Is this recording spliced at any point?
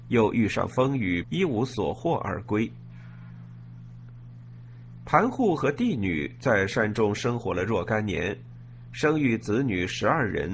yes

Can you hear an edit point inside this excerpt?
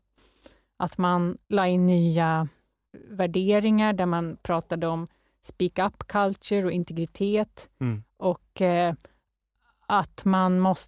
yes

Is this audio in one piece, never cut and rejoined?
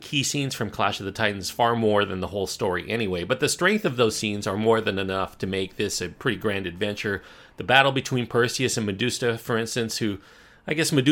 yes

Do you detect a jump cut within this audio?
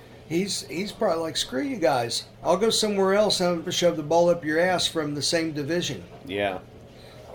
yes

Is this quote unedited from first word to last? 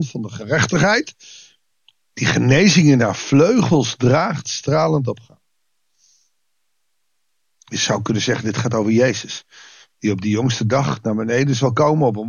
yes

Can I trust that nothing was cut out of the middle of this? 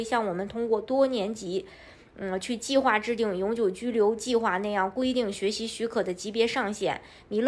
yes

